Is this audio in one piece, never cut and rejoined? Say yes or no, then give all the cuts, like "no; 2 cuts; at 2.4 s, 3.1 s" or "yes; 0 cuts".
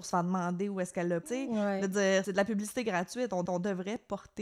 no; 4 cuts; at 0.9 s, 1.2 s, 2.2 s, 3.5 s